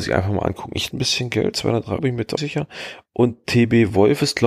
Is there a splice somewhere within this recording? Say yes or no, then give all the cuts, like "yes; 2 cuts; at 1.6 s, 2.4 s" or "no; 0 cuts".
yes; 4 cuts; at 0.9 s, 1.5 s, 2.0 s, 2.4 s